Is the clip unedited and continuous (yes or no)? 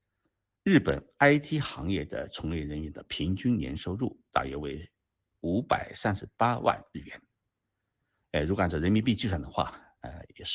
yes